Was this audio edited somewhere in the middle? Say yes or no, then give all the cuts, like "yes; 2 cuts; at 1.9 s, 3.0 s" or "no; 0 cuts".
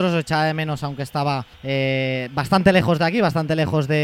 yes; 1 cut; at 1.5 s